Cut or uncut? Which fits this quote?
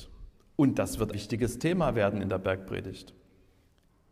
cut